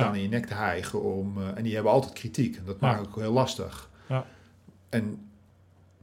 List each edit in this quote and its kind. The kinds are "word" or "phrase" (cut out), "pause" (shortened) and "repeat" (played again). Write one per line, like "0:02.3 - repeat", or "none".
none